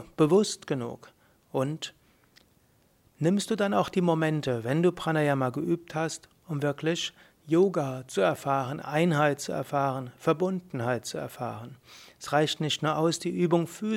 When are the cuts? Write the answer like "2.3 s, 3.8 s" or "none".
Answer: none